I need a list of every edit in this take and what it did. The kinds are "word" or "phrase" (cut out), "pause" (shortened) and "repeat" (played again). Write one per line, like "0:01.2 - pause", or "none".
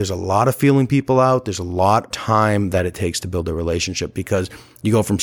0:02.1 - word